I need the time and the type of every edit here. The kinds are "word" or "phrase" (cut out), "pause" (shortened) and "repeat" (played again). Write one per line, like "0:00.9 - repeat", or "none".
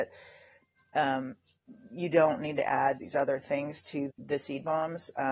0:03.0 - word
0:04.1 - word